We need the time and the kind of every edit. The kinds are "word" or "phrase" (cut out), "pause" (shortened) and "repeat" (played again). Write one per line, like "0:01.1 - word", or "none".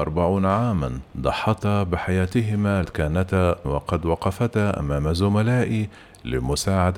0:01.1 - pause
0:02.8 - phrase
0:03.6 - word